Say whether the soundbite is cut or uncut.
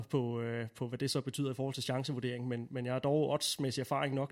uncut